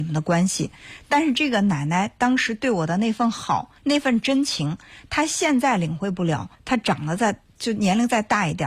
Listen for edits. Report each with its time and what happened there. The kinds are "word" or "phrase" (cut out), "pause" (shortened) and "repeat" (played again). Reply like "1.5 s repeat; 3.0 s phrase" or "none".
3.8 s pause; 6.5 s pause